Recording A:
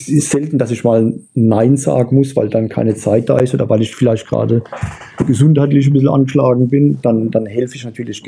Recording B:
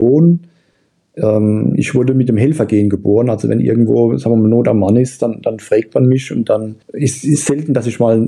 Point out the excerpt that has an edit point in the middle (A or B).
B